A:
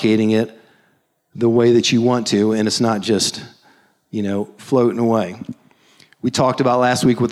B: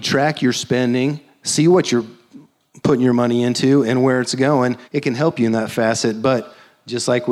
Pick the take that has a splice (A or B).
B